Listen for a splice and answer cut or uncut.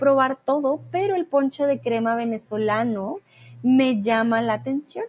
uncut